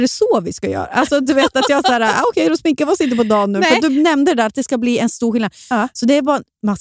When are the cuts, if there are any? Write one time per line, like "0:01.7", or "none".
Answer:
none